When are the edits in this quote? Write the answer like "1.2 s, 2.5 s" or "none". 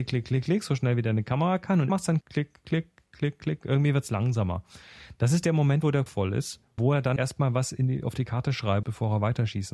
1.9 s, 2.2 s, 6.1 s, 6.8 s, 7.2 s, 8.8 s